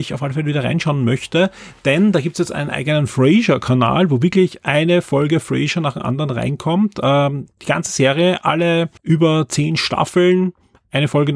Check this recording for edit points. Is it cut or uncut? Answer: cut